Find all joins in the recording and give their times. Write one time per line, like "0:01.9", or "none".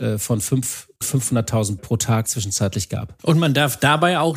0:01.0
0:01.8
0:02.2
0:03.2